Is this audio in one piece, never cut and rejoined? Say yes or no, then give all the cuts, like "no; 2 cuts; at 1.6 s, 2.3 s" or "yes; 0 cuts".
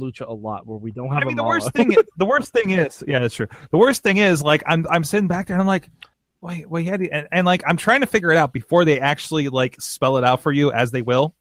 no; 1 cut; at 6.1 s